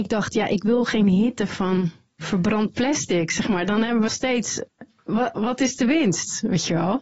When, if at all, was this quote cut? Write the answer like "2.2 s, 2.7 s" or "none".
4.1 s